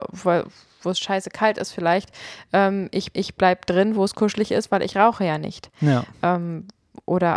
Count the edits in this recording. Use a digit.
1